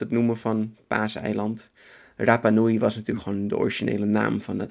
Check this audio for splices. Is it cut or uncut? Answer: uncut